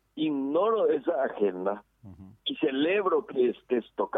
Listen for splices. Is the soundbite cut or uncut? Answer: cut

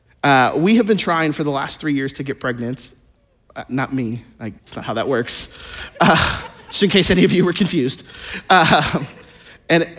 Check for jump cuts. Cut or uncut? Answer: cut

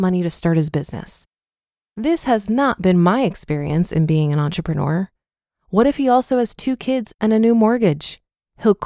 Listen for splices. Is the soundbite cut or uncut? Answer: uncut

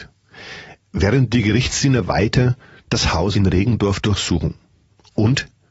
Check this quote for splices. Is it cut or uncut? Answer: uncut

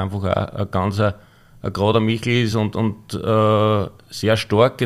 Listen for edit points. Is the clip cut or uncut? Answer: uncut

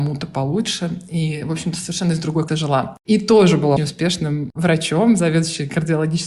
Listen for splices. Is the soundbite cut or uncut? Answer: cut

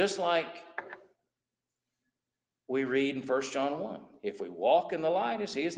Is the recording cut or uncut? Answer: uncut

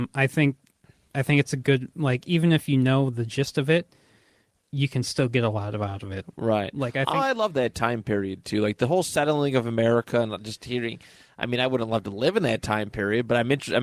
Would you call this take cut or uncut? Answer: uncut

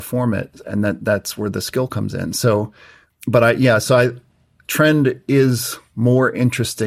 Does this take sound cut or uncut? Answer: uncut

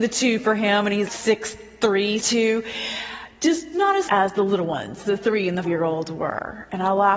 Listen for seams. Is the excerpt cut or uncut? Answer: cut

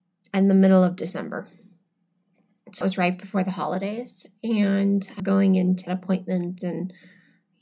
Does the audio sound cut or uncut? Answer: cut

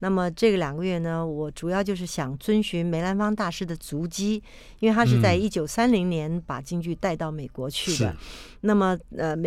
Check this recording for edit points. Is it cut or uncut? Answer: uncut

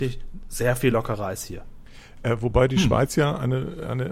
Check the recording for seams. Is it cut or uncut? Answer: uncut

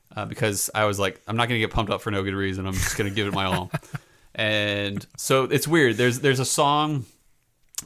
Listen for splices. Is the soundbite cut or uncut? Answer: uncut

